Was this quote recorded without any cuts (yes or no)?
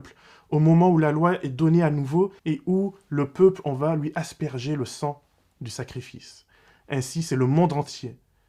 no